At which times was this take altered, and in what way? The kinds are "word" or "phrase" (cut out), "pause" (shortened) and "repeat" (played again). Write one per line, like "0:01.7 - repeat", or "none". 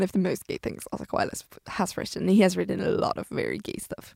none